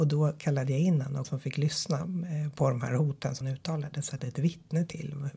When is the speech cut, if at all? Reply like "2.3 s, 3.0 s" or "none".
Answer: 1.2 s, 3.4 s, 4.2 s